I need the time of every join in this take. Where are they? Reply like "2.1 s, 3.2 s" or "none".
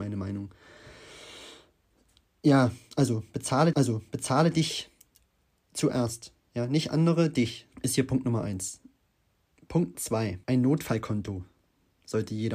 3.7 s, 7.7 s, 9.9 s, 10.4 s